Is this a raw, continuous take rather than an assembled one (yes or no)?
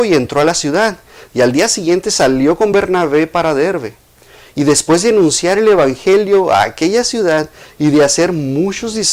yes